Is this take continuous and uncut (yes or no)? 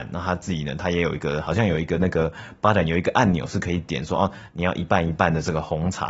yes